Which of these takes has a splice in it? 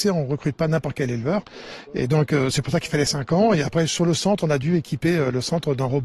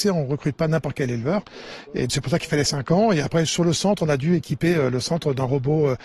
second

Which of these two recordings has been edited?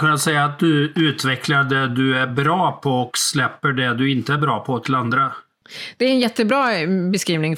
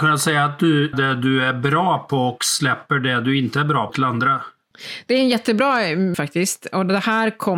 second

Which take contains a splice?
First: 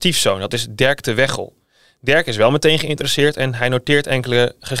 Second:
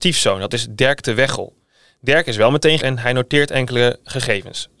second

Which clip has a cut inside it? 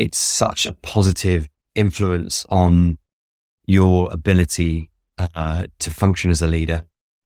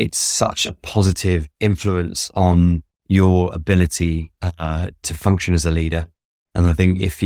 second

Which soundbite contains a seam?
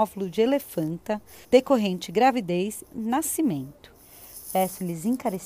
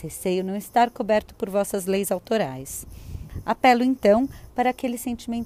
first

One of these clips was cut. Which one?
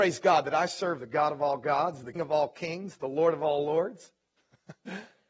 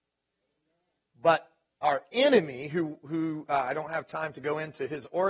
first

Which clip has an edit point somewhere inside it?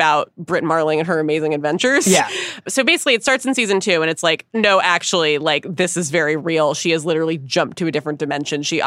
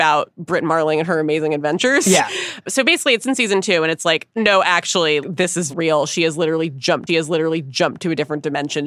second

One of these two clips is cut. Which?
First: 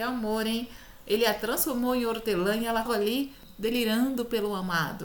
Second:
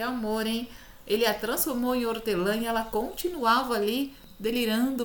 first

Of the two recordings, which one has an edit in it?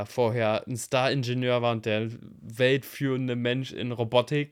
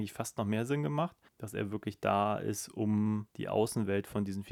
second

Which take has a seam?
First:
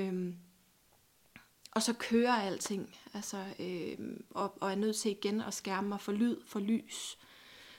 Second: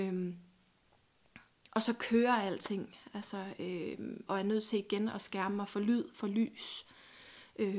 second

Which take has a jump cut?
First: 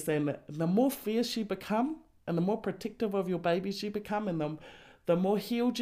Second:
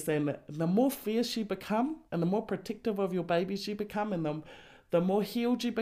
second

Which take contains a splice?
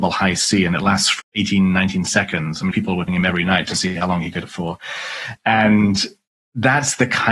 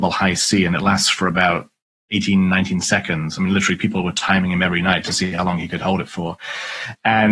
first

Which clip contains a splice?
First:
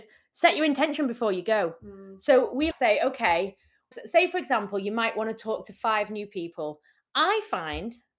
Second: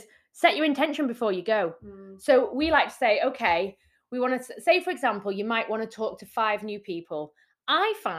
first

